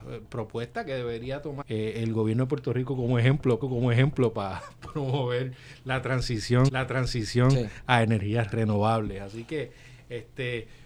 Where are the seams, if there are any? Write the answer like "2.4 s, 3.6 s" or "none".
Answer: 1.6 s, 3.6 s, 6.7 s, 8.5 s